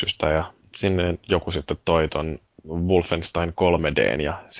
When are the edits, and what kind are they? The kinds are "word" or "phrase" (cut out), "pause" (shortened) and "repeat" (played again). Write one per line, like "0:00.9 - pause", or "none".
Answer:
none

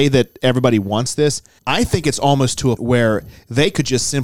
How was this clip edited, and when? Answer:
0:01.6 - pause
0:02.8 - word

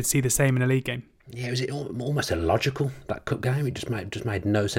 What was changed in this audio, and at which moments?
0:01.2 - pause

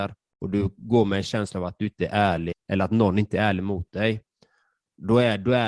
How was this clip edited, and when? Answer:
0:02.5 - word

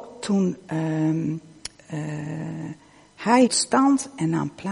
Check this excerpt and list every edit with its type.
0:03.5 - word

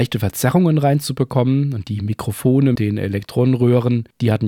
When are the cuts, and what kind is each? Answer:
0:02.8 - word

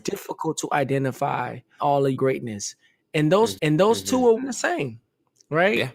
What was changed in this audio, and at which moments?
0:01.8 - phrase
0:02.1 - word
0:03.6 - repeat
0:04.4 - word

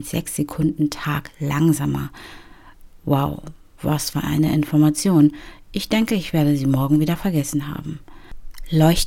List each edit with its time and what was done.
none

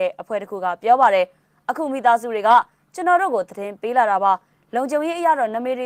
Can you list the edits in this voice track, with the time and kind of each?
none

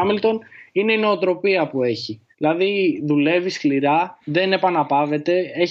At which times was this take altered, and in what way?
0:02.3 - pause
0:04.2 - pause

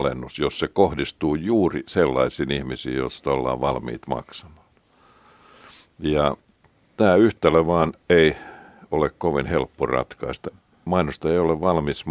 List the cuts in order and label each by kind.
none

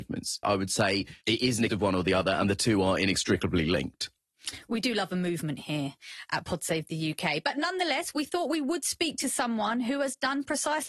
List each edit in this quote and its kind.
0:01.2 - pause
0:01.7 - word

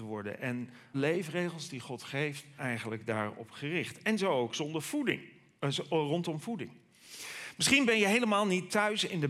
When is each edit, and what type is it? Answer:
0:00.9 - word
0:02.6 - word

